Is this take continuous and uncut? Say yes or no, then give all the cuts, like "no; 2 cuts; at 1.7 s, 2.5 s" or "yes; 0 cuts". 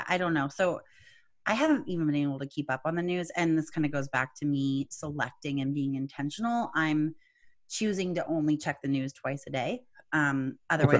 yes; 0 cuts